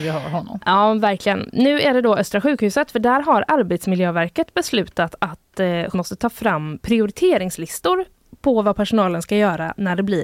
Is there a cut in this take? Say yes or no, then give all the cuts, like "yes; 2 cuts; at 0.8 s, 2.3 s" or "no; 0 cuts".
yes; 1 cut; at 5.9 s